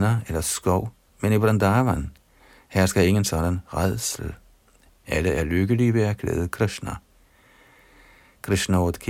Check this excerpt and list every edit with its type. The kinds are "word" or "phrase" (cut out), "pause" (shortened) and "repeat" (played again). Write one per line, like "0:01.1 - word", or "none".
none